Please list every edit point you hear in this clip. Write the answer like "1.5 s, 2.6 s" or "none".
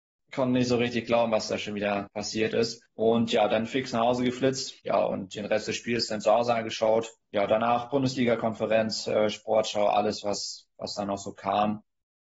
4.8 s